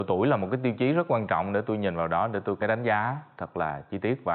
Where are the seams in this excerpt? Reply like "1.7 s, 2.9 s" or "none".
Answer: 2.6 s